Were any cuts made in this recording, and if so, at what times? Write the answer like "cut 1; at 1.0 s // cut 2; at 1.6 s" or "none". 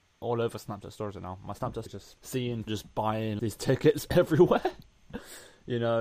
cut 1; at 1.9 s // cut 2; at 2.2 s // cut 3; at 2.7 s // cut 4; at 3.4 s